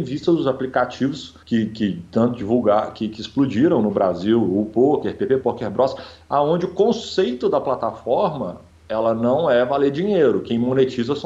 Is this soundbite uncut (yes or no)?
no